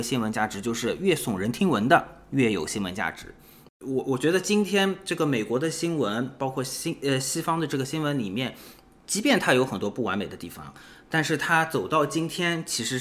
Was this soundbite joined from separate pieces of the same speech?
no; 0 cuts

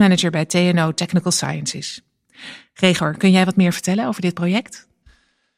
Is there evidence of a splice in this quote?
no; 0 cuts

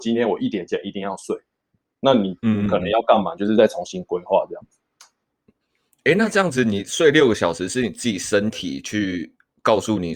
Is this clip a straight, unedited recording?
yes; 0 cuts

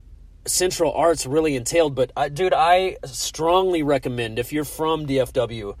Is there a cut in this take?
no; 0 cuts

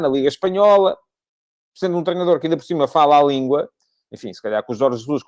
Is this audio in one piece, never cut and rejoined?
yes; 0 cuts

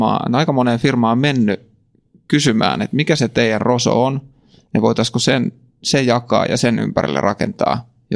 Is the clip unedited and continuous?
yes; 0 cuts

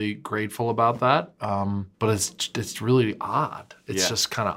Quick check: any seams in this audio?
yes; 1 cut; at 1.9 s

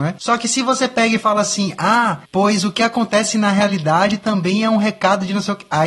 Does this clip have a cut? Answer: no; 0 cuts

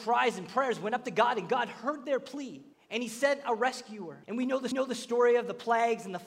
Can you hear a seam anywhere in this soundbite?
yes; 3 cuts; at 2.7 s, 4.2 s, 4.7 s

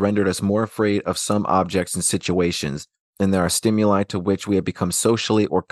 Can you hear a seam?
no; 0 cuts

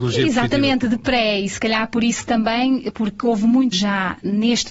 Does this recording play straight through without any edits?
no; 1 cut; at 3.7 s

